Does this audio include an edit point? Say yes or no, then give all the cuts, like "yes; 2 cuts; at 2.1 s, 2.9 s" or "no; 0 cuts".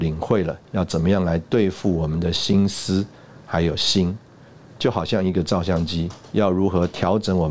no; 0 cuts